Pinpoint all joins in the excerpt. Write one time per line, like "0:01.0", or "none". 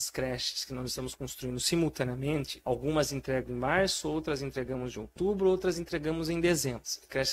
none